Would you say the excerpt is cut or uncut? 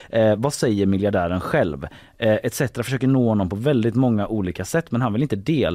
uncut